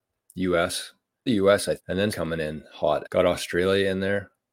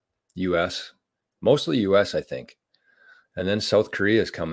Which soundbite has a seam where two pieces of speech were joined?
first; 4 cuts; at 1.3 s, 1.8 s, 2.1 s, 3.0 s

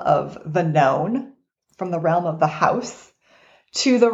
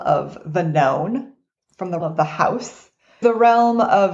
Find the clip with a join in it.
second; 2 cuts; at 2.0 s, 3.2 s

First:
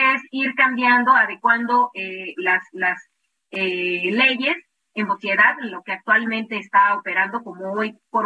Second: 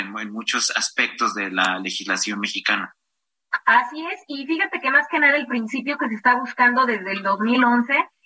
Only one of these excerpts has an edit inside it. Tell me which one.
first; 1 cut; at 5.1 s

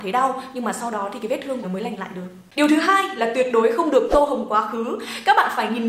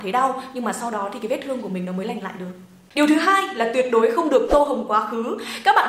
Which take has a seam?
first; 2 cuts; at 1.6 s, 2.5 s

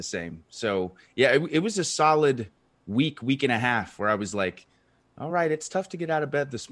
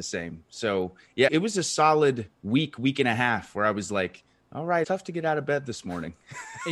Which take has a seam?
second; 4 cuts; at 1.3 s, 2.3 s, 4.4 s, 4.8 s

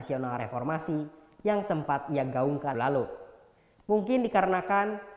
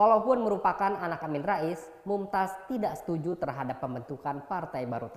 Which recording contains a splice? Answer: first; 1 cut; at 2.7 s

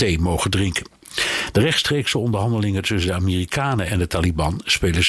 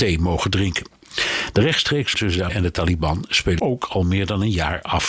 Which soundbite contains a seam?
second; 3 cuts; at 2.1 s, 2.5 s, 3.6 s

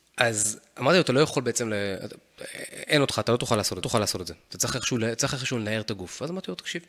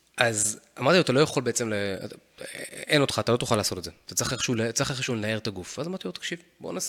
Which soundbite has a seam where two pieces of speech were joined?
first; 1 cut; at 3.8 s

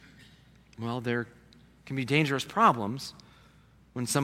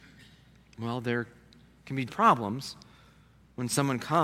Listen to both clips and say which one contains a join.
second; 1 cut; at 2.1 s

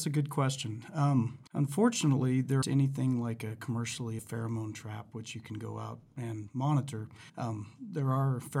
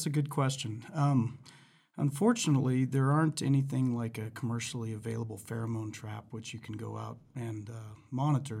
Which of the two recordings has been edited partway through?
first; 5 cuts; at 1.5 s, 2.6 s, 4.2 s, 6.5 s, 7.3 s

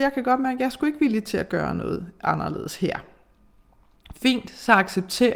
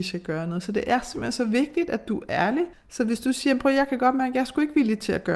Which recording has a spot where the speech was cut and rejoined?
second; 1 cut; at 2.7 s

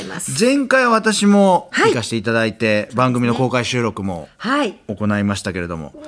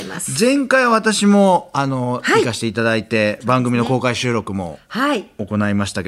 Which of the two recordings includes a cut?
first; 1 cut; at 1.7 s

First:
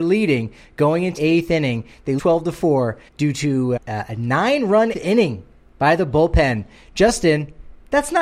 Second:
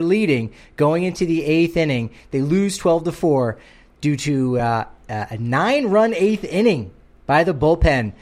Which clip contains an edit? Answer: first; 5 cuts; at 1.2 s, 2.2 s, 3.1 s, 3.8 s, 4.9 s

